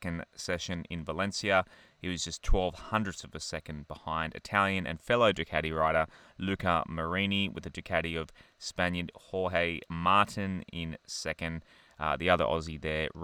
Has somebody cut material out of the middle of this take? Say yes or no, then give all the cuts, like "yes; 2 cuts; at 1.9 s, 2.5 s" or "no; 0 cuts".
no; 0 cuts